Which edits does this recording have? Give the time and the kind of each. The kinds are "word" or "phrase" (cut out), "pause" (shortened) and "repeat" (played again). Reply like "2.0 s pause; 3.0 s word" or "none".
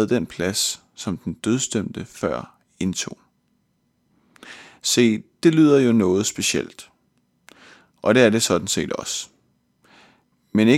none